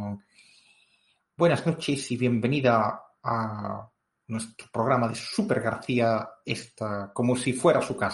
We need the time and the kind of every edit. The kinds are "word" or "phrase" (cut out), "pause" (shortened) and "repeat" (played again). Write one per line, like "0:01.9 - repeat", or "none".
none